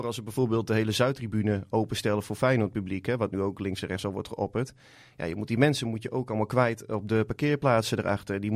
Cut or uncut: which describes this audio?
uncut